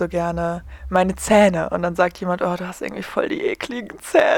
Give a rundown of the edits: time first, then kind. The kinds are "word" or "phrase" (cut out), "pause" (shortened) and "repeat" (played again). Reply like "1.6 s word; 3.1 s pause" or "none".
none